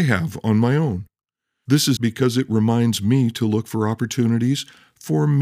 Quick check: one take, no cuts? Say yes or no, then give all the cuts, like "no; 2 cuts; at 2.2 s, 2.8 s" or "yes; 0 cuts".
no; 1 cut; at 2.0 s